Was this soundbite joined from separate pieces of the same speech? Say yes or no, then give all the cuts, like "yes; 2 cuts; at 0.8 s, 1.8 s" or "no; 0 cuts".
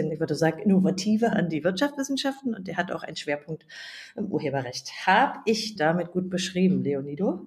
yes; 2 cuts; at 1.3 s, 5.8 s